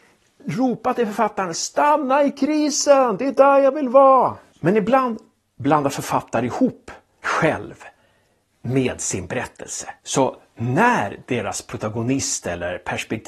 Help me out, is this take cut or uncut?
cut